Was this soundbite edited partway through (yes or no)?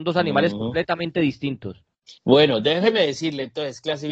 yes